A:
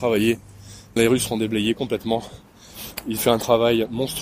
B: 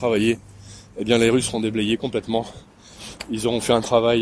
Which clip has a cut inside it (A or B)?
A